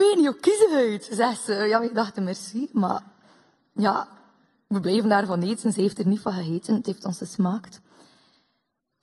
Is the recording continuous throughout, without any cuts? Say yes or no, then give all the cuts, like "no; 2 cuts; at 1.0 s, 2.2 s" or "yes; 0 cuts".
yes; 0 cuts